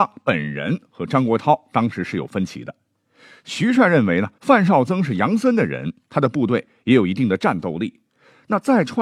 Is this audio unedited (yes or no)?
no